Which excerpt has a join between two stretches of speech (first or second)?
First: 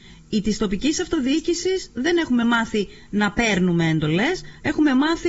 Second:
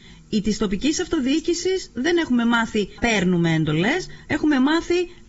second